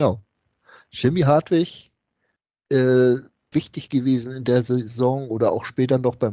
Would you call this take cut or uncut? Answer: cut